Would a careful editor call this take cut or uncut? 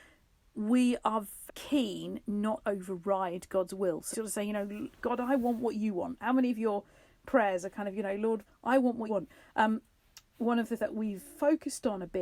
cut